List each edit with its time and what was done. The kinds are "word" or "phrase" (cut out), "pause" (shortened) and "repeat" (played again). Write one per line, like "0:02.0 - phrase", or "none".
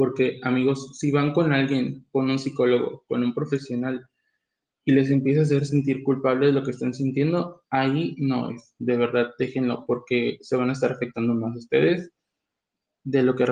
none